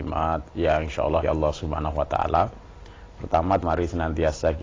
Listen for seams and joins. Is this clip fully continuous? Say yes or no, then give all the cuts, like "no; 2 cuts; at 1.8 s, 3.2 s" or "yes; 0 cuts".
no; 2 cuts; at 1.2 s, 3.6 s